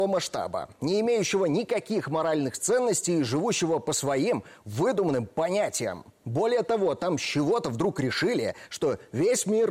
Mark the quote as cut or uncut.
uncut